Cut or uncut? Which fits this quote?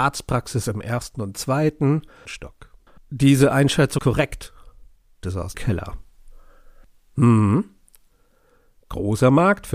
cut